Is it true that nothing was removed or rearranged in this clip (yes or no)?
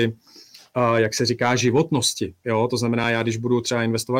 yes